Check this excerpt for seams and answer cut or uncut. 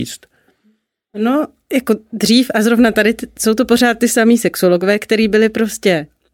uncut